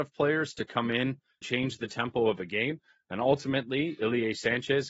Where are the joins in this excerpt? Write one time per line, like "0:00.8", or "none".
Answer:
0:01.4